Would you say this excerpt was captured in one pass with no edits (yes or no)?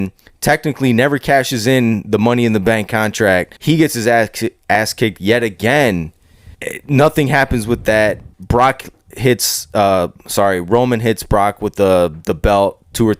no